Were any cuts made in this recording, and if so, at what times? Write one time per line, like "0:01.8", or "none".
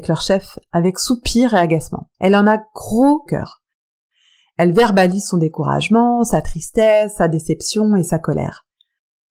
0:02.1
0:03.3